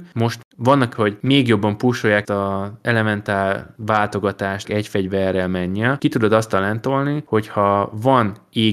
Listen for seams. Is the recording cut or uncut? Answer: cut